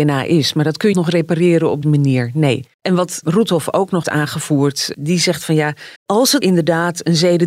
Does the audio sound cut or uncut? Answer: cut